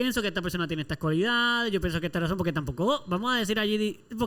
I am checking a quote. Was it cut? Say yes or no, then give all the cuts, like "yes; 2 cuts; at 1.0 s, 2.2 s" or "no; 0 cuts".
no; 0 cuts